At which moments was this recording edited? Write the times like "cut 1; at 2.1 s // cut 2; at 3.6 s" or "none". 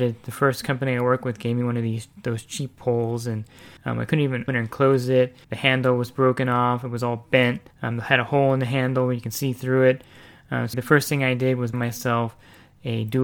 cut 1; at 3.8 s // cut 2; at 4.5 s // cut 3; at 5.4 s // cut 4; at 7.7 s // cut 5; at 10.7 s // cut 6; at 11.7 s